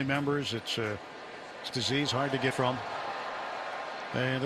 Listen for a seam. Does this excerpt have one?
yes; 2 cuts; at 1.7 s, 2.5 s

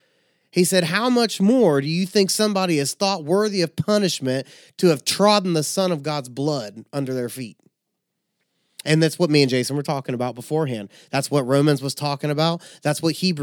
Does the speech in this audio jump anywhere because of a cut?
no; 0 cuts

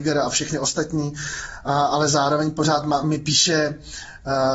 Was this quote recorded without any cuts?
yes; 0 cuts

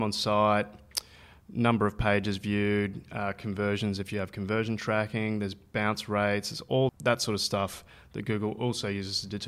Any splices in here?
yes; 1 cut; at 6.9 s

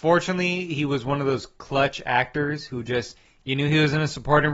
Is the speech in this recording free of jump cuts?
yes; 0 cuts

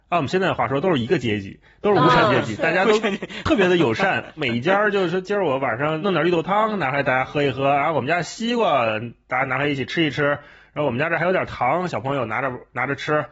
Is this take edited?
no; 0 cuts

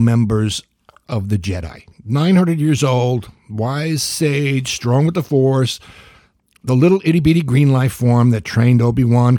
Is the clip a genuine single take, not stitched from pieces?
yes; 0 cuts

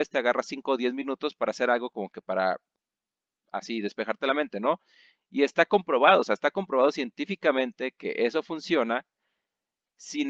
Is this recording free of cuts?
yes; 0 cuts

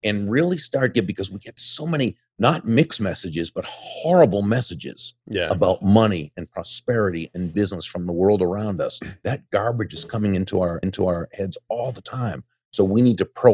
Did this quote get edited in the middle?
yes; 1 cut; at 10.8 s

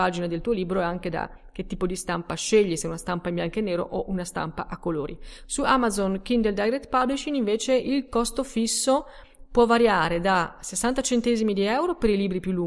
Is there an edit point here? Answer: no; 0 cuts

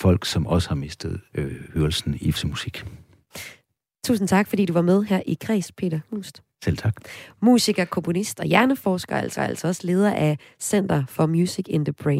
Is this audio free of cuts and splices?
no; 3 cuts; at 1.3 s, 2.3 s, 9.4 s

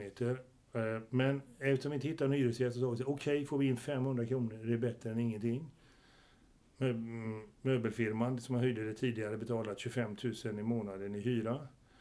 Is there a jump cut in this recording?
no; 0 cuts

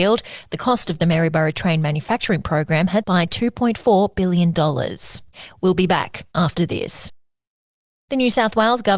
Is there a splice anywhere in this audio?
yes; 1 cut; at 3.0 s

